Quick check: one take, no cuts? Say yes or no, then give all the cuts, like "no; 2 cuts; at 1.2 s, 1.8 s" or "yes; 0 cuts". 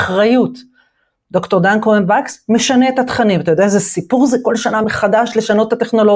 yes; 0 cuts